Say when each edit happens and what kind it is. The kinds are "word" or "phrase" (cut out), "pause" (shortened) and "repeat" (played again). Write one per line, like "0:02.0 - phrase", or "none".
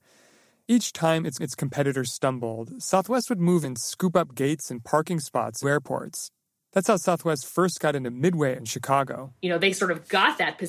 0:01.4 - repeat
0:03.6 - word
0:05.6 - word
0:08.6 - word
0:09.4 - pause

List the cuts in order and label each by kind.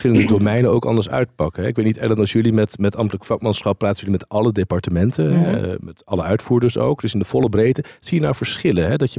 none

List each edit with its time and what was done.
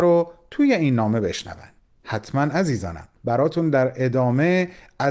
0:01.8 - pause
0:03.1 - pause

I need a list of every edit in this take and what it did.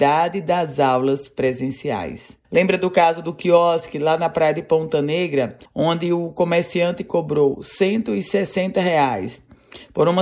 0:02.4 - pause
0:05.6 - pause

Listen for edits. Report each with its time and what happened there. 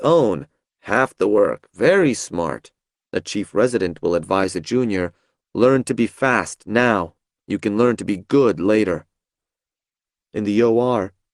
0:02.9 - pause

